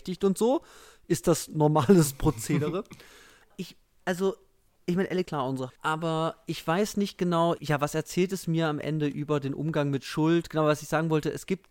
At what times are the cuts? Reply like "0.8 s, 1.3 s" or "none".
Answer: 3.5 s, 5.2 s, 5.7 s, 7.6 s